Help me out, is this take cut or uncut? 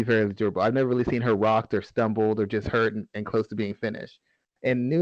uncut